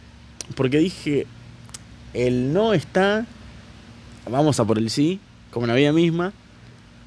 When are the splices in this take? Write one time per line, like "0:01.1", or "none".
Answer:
0:05.3